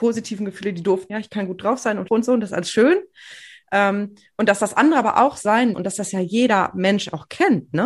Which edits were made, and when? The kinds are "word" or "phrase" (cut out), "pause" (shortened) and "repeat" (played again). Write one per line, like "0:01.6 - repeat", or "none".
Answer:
0:01.1 - phrase
0:02.1 - word
0:05.7 - word